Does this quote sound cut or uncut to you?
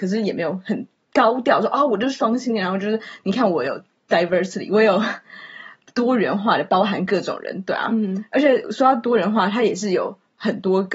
uncut